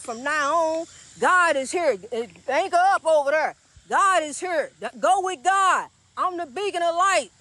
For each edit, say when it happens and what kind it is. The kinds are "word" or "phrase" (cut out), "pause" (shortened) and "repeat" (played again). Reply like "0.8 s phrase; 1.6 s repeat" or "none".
none